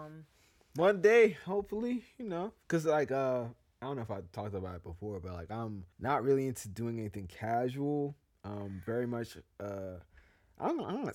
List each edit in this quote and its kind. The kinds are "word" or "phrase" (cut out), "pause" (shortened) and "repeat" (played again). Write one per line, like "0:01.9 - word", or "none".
0:05.9 - pause